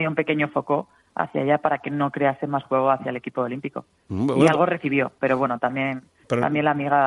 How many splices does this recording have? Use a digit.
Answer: 0